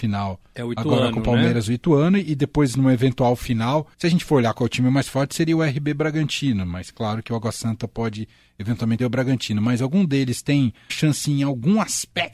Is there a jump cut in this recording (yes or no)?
yes